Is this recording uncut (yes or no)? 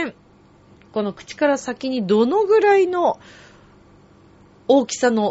yes